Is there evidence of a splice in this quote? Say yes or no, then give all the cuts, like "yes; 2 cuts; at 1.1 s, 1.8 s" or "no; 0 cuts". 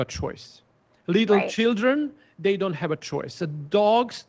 no; 0 cuts